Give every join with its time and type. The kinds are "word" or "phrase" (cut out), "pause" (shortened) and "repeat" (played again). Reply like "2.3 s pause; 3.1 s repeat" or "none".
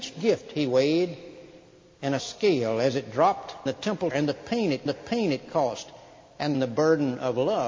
2.2 s word; 3.7 s word; 4.1 s word; 4.9 s repeat; 6.5 s phrase